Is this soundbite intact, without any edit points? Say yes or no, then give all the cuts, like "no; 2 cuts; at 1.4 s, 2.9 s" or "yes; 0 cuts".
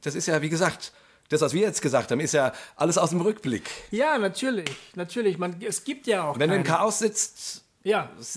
yes; 0 cuts